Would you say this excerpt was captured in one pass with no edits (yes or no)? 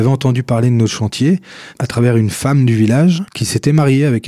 no